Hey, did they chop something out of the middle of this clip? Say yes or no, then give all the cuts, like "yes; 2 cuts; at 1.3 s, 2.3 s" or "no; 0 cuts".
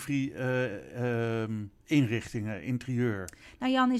yes; 1 cut; at 1.8 s